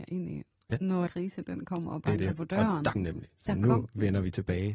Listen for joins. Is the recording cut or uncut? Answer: cut